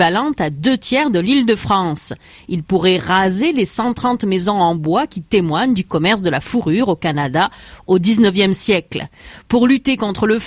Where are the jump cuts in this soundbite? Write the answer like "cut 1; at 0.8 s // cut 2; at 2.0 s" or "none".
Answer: none